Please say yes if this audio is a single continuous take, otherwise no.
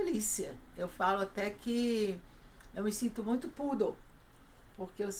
yes